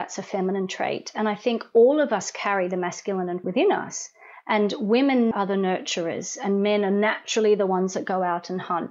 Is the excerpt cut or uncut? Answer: cut